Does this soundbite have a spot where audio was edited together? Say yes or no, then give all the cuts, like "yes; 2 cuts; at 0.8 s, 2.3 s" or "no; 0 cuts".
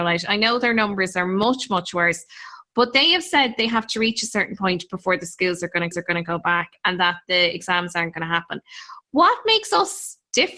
yes; 1 cut; at 5.9 s